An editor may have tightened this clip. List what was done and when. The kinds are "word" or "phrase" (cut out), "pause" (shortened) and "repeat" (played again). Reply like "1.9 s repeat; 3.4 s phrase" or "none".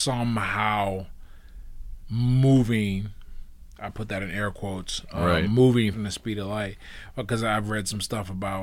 2.0 s word; 5.9 s word